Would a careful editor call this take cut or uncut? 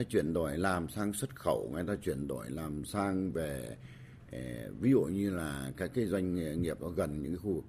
cut